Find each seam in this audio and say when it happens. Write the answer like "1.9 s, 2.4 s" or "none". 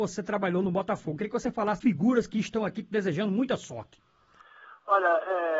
1.8 s